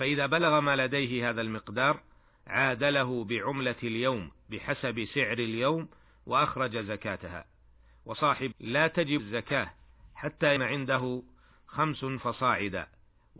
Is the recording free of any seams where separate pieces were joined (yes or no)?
no